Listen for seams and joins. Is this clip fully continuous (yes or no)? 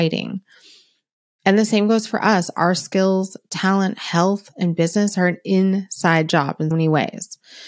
no